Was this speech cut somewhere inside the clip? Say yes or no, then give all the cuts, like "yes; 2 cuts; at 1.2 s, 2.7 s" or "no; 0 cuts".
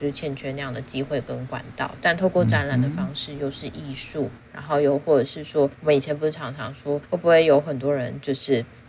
yes; 2 cuts; at 5.7 s, 7.0 s